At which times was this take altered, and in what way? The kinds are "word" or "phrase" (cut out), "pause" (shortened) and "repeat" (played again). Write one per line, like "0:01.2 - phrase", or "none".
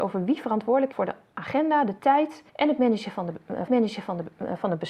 0:00.9 - word
0:02.5 - pause
0:03.7 - repeat